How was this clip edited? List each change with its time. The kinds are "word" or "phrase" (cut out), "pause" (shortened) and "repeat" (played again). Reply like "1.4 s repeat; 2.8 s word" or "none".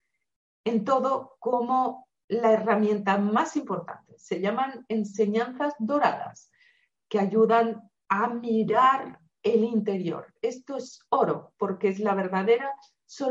none